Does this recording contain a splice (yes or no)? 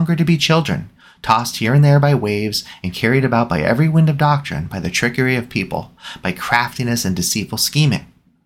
no